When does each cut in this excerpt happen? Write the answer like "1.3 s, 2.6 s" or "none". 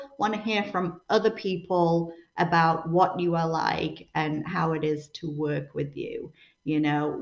none